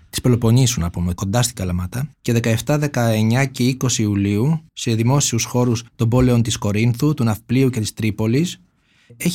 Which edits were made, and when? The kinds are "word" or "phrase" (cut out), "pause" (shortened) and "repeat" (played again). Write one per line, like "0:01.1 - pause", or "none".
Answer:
0:01.2 - word
0:02.1 - pause
0:04.7 - pause
0:05.9 - pause